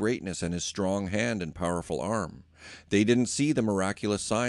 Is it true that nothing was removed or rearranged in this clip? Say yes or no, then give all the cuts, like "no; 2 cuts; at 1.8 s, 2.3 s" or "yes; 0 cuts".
yes; 0 cuts